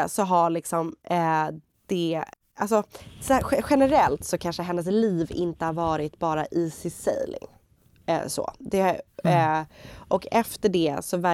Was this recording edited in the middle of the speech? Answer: yes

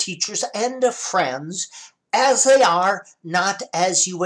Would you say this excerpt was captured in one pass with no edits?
yes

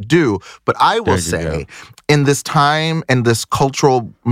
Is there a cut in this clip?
no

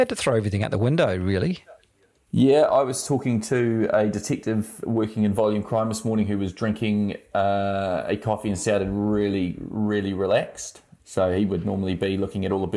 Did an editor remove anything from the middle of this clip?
no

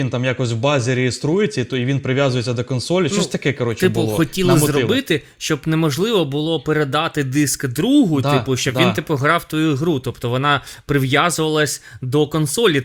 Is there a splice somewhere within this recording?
no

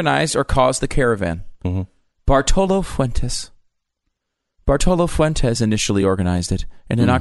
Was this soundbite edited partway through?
no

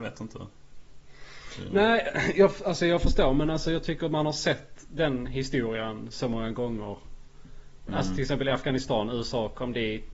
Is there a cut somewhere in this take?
no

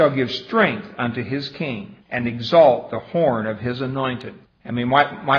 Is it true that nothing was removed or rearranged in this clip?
no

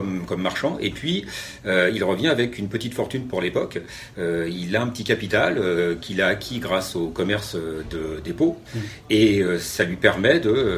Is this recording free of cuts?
yes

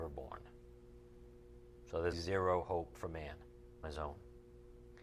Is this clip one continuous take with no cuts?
no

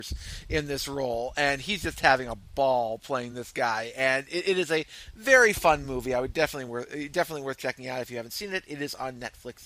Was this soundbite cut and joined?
no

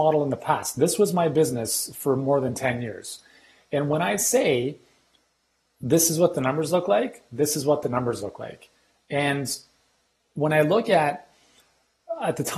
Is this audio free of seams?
yes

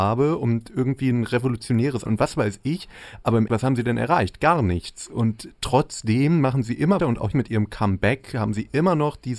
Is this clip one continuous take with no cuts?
no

